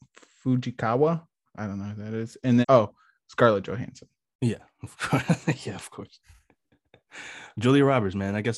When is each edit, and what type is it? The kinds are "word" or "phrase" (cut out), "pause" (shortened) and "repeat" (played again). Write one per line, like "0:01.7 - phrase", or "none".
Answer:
0:02.6 - word